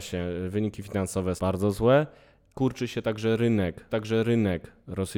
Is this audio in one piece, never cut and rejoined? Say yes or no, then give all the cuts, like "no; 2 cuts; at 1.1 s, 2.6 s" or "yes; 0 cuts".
no; 3 cuts; at 1.4 s, 2.5 s, 3.9 s